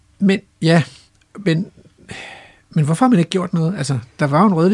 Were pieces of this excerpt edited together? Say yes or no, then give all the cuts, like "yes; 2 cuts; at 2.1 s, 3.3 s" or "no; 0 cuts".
no; 0 cuts